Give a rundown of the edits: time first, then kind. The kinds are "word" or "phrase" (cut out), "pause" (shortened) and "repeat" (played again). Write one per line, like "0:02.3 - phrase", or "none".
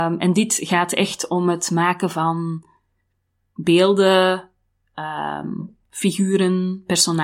none